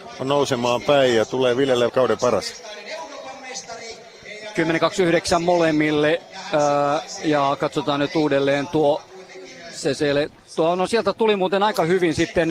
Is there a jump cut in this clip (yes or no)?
yes